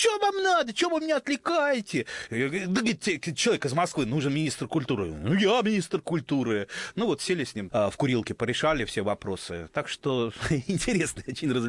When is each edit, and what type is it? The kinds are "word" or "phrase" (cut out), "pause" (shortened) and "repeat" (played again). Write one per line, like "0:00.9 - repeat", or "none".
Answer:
0:07.7 - word